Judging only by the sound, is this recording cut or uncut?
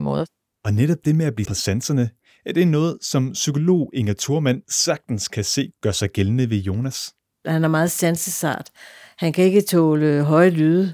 cut